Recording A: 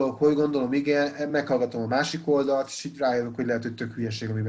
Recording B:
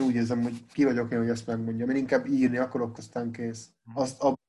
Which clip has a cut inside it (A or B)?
B